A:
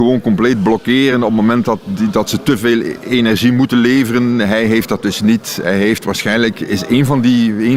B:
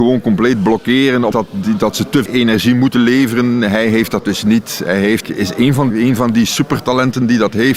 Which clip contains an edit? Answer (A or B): B